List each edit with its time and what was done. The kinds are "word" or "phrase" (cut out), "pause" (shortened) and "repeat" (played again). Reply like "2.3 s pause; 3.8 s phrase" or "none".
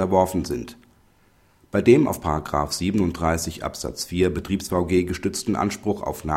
none